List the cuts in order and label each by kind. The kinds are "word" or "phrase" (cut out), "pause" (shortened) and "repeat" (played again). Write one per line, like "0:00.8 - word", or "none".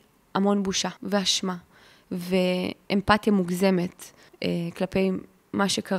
0:01.0 - pause
0:04.3 - pause